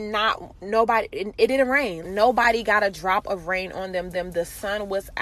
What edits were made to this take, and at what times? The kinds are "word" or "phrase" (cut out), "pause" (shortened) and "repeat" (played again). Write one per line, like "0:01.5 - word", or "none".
0:02.0 - word
0:04.1 - repeat